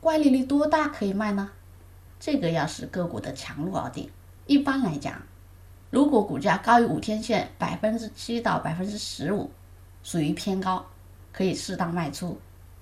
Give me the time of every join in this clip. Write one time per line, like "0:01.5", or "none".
0:02.1
0:04.4
0:05.8